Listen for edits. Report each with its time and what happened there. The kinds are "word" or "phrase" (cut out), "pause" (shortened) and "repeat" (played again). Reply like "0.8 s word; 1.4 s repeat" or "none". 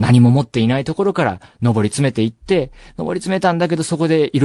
none

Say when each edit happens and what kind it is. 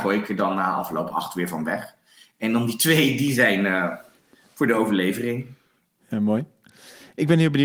none

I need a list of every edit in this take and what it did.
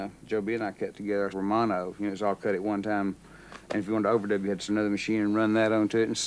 1.3 s word; 4.7 s word

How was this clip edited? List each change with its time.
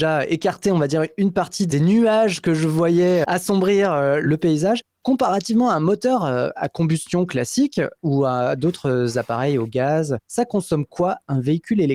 3.2 s word

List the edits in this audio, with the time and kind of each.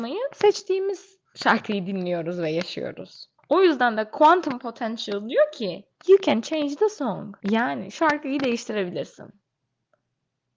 1.3 s pause; 3.4 s pause; 6.0 s pause; 7.4 s pause

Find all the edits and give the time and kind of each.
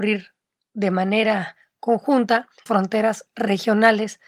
2.7 s word

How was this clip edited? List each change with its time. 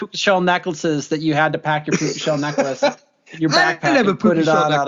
none

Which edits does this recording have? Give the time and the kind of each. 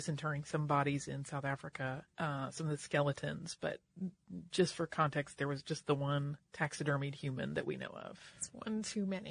2.1 s pause; 6.4 s pause

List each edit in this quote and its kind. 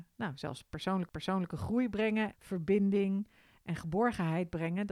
1.1 s repeat; 2.3 s word

